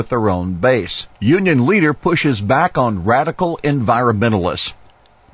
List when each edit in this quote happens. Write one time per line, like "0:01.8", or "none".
0:01.1